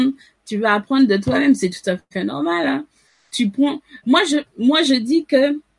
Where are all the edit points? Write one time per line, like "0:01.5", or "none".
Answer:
none